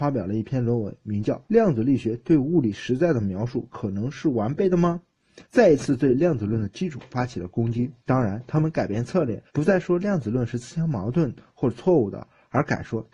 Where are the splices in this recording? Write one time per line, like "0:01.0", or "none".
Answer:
0:01.4
0:05.4
0:08.0
0:09.5